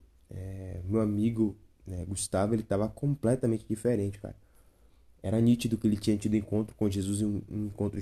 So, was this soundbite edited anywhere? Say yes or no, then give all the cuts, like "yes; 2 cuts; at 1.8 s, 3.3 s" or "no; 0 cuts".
no; 0 cuts